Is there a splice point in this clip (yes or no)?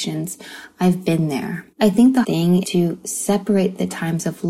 yes